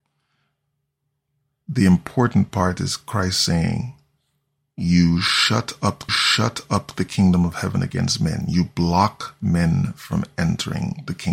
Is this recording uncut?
no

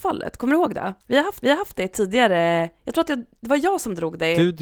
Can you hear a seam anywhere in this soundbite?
yes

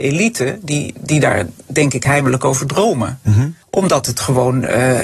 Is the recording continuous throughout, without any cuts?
no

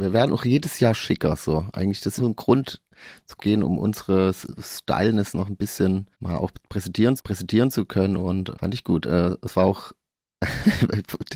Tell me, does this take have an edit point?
yes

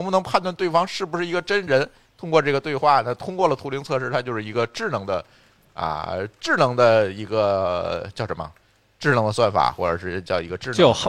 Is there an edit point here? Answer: no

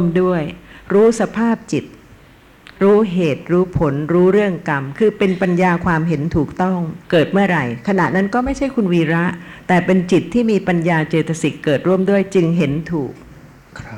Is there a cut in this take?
yes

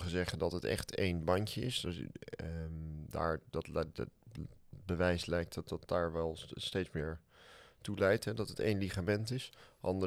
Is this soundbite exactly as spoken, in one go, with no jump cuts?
yes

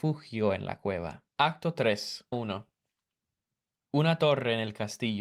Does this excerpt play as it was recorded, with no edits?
no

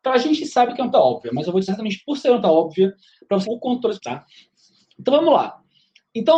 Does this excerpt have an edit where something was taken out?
yes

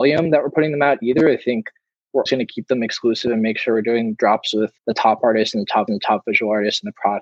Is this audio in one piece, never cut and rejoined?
no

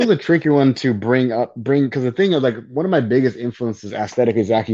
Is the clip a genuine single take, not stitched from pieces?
yes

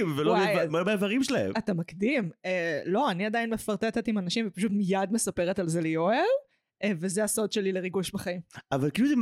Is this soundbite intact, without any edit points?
yes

